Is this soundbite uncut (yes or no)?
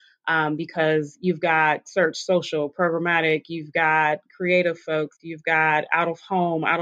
yes